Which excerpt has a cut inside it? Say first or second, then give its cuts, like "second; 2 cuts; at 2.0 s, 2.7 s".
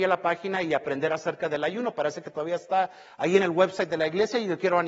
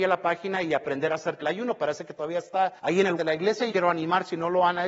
second; 4 cuts; at 1.4 s, 2.8 s, 3.2 s, 3.7 s